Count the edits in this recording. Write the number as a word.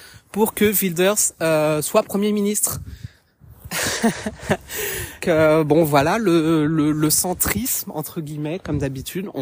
one